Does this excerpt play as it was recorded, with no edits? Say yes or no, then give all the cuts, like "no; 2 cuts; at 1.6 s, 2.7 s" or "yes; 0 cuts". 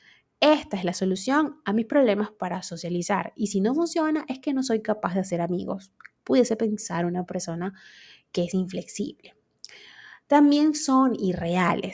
yes; 0 cuts